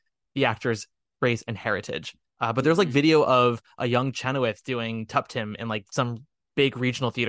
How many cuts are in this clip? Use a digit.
0